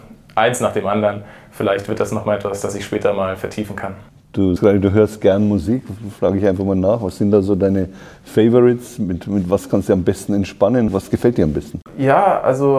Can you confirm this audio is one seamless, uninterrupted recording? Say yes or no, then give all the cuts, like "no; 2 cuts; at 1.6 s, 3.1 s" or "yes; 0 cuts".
no; 1 cut; at 4.6 s